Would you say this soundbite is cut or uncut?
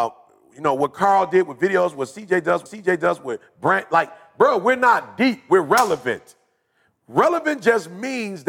cut